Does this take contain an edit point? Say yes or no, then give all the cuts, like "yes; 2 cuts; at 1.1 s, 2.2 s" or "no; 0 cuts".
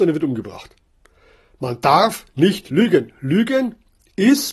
no; 0 cuts